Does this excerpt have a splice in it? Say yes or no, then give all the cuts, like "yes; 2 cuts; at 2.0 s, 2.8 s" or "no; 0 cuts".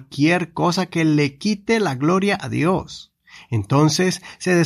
no; 0 cuts